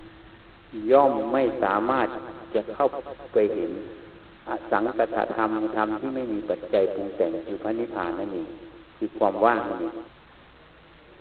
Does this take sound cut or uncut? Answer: cut